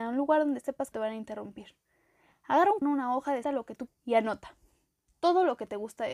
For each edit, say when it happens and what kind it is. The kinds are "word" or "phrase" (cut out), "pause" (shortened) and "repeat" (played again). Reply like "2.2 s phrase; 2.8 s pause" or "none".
0.9 s word; 2.8 s word; 3.4 s word; 3.9 s word